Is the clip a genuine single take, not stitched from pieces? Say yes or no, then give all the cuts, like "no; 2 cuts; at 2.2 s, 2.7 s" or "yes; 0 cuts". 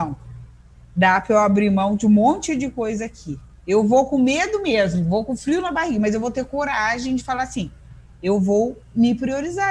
no; 1 cut; at 3.5 s